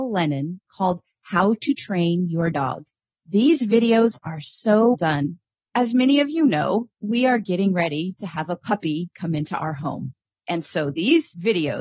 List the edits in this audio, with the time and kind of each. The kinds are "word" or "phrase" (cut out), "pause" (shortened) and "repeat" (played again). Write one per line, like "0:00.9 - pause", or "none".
0:02.5 - word
0:04.9 - word

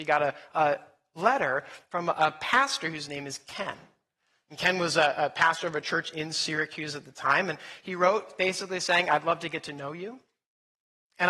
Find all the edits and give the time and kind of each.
none

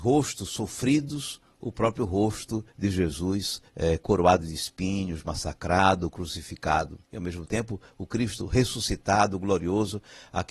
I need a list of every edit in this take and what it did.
0:02.7 - pause
0:03.7 - pause
0:07.0 - pause

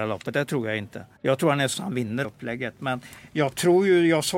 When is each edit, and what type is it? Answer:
0:01.2 - pause
0:01.7 - word
0:02.2 - phrase

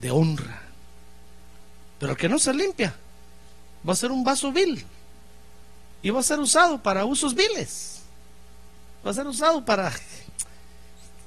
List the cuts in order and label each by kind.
none

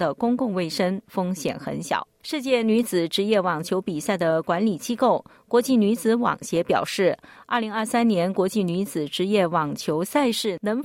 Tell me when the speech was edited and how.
none

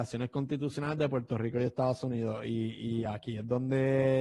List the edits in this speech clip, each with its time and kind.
none

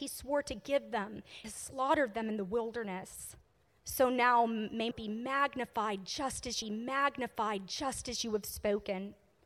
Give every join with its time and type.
0:01.4 - word
0:03.6 - pause
0:04.9 - phrase
0:06.6 - repeat

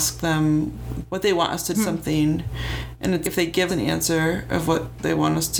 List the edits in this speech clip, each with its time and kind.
0:01.1 - word
0:01.7 - phrase
0:03.2 - word
0:03.7 - word

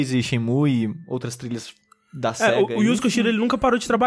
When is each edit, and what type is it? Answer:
none

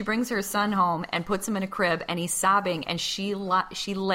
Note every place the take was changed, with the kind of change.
none

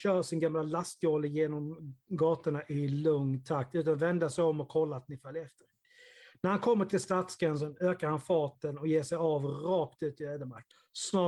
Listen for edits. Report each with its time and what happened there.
none

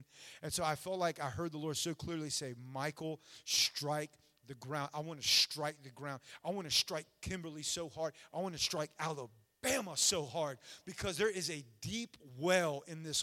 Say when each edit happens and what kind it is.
none

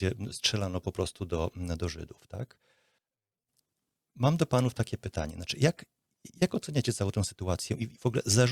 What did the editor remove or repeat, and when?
none

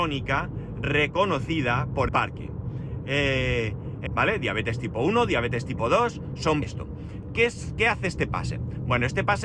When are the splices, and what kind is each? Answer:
0:02.1 - word
0:04.1 - phrase
0:06.6 - phrase

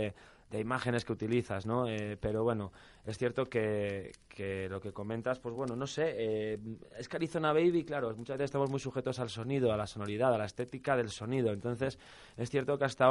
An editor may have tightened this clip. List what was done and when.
none

